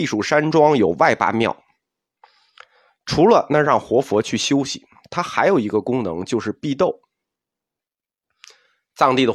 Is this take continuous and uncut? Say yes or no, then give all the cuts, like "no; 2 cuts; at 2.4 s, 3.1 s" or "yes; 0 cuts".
yes; 0 cuts